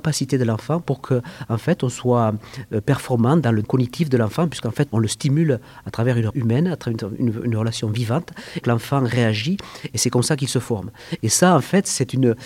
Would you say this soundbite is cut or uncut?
cut